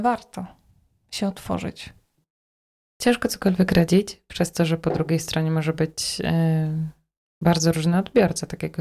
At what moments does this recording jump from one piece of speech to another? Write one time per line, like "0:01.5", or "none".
none